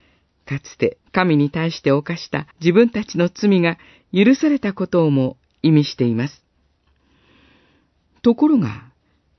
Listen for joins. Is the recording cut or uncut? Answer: cut